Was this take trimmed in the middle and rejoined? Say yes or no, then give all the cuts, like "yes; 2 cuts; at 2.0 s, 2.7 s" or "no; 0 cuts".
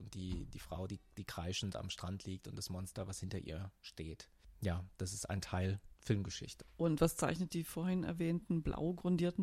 yes; 1 cut; at 6.0 s